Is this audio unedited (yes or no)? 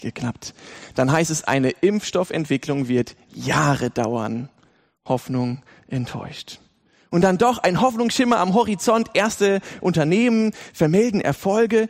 yes